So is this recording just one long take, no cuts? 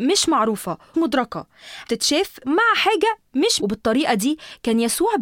no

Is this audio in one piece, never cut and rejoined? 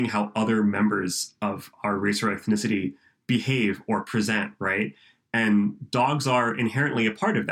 yes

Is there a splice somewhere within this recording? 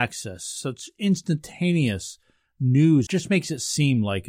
yes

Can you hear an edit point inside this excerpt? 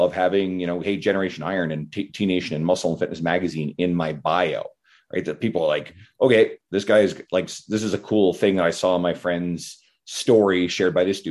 no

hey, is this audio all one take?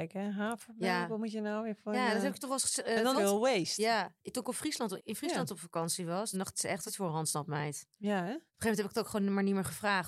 no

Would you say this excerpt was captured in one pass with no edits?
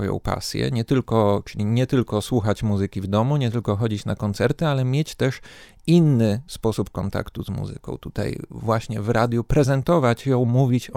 yes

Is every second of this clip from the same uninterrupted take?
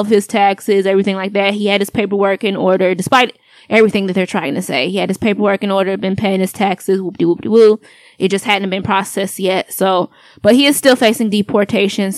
yes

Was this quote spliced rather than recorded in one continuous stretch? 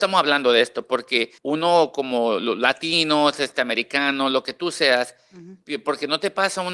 yes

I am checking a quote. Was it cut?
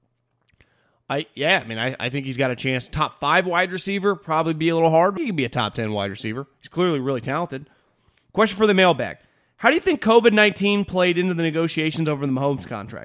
yes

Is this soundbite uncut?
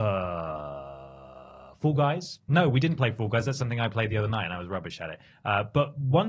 yes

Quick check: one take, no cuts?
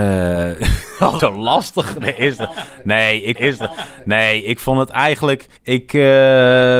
no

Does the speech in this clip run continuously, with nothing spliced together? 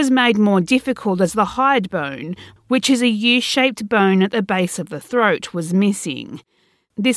yes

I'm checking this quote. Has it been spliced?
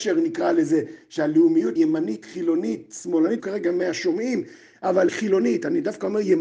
yes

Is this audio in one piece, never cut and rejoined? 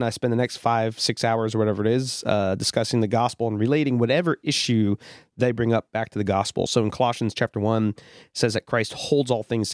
yes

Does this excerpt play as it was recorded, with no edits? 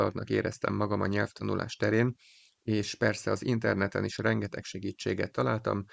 yes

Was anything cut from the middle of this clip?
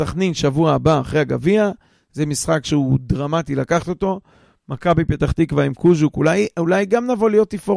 no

